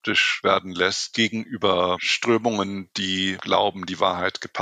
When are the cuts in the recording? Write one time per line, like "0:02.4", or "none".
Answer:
none